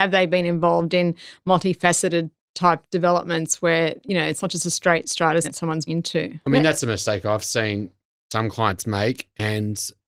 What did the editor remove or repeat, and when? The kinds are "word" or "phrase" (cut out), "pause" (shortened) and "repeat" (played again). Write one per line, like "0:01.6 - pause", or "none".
0:05.4 - word
0:05.9 - word